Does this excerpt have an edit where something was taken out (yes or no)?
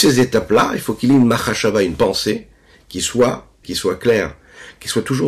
yes